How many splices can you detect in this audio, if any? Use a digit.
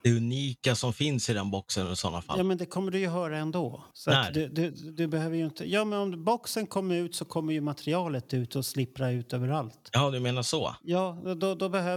1